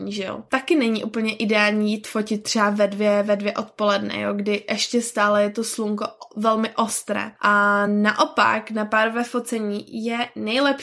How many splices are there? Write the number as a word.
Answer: zero